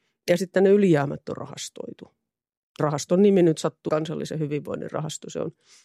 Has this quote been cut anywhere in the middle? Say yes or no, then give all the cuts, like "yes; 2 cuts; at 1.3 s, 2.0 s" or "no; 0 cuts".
yes; 2 cuts; at 2.8 s, 3.9 s